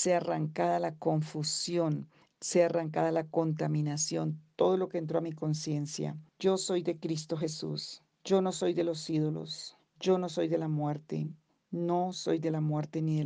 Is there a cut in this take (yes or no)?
yes